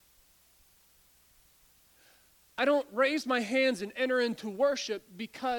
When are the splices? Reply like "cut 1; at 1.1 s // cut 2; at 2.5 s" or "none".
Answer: none